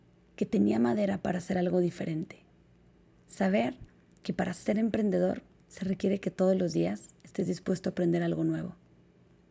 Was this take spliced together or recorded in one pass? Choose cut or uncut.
uncut